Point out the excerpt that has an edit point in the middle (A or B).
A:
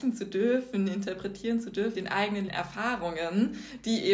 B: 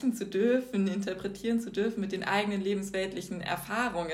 A